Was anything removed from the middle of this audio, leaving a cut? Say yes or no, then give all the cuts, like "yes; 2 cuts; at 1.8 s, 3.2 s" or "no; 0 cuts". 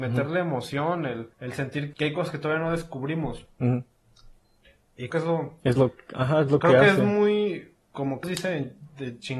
yes; 4 cuts; at 1.3 s, 1.9 s, 5.1 s, 8.2 s